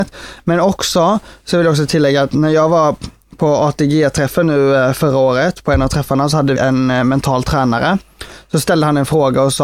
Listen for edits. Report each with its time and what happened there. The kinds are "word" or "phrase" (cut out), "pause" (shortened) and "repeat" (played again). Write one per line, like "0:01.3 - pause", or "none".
0:06.6 - word

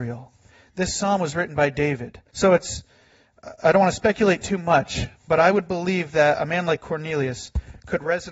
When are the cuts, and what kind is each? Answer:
0:02.3 - pause
0:05.2 - pause

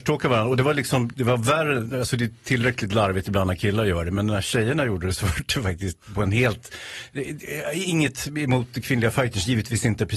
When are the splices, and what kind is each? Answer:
0:01.1 - word

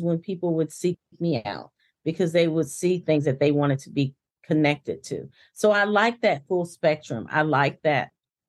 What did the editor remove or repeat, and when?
none

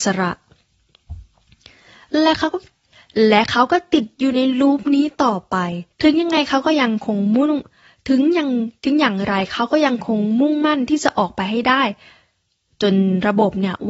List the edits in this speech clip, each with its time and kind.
0:05.9 - pause

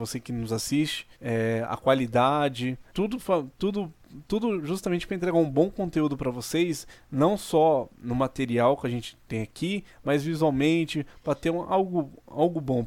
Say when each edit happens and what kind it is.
0:01.1 - pause
0:02.9 - pause

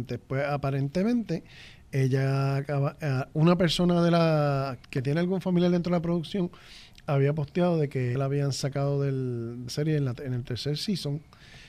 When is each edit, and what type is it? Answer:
0:04.8 - word
0:08.2 - word
0:09.7 - word

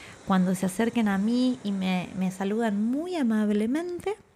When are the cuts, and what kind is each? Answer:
none

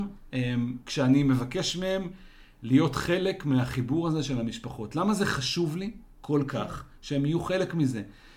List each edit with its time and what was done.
none

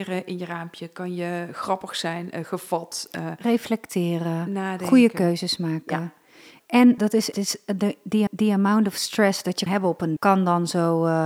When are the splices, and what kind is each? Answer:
0:07.0 - word
0:07.3 - phrase
0:08.3 - repeat
0:09.7 - word
0:10.2 - word

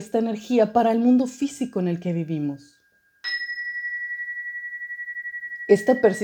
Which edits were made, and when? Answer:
none

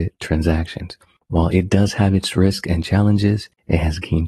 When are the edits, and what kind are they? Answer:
none

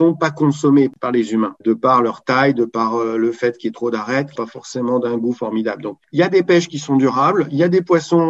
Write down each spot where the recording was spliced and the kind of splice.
0:01.6 - word
0:04.4 - word

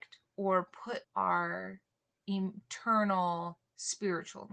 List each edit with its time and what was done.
0:01.0 - word

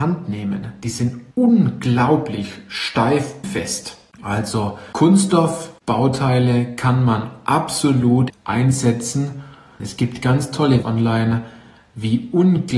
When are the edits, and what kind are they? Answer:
0:01.3 - pause
0:03.4 - word
0:08.3 - phrase
0:10.8 - word

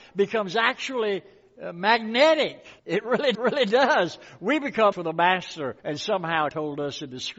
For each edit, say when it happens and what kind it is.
0:02.8 - pause
0:03.3 - repeat
0:04.9 - word
0:05.8 - pause
0:06.5 - word

